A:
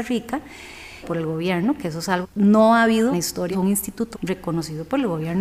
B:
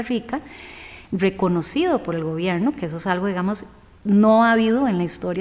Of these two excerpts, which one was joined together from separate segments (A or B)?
A